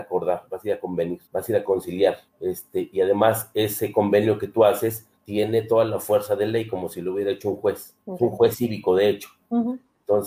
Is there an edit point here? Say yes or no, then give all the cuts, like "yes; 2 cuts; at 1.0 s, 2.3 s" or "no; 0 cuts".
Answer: yes; 4 cuts; at 1.3 s, 2.3 s, 5.2 s, 8.0 s